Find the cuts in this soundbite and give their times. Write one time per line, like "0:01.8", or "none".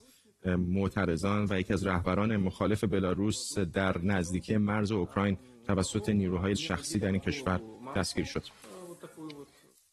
0:06.6